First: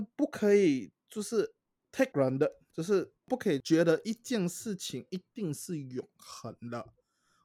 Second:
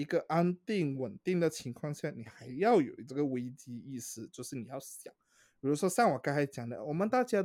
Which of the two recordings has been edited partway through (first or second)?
first